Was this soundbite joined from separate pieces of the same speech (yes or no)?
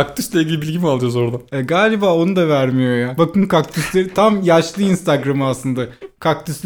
no